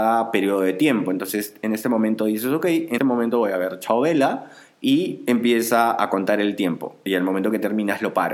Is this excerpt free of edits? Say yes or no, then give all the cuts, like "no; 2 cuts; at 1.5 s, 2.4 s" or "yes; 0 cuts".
no; 1 cut; at 3.0 s